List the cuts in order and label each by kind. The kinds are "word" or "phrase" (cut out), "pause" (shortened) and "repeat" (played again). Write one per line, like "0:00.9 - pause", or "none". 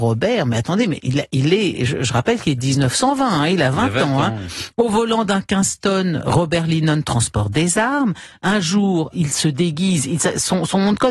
0:09.1 - word